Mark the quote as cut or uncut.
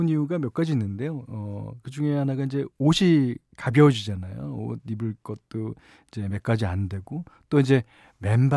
uncut